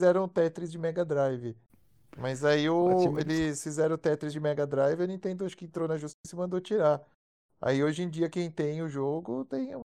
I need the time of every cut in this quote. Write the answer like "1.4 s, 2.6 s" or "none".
none